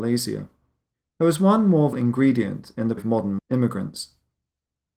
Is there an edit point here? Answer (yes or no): yes